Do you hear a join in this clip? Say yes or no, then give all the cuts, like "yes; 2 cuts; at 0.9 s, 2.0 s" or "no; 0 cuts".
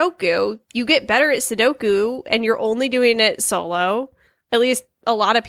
no; 0 cuts